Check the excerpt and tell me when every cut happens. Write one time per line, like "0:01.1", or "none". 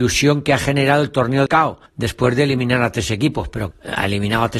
0:01.5
0:01.9
0:03.7